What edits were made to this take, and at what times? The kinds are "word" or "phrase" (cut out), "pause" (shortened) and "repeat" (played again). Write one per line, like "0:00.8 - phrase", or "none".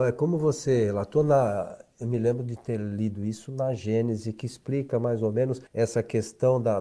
0:05.7 - pause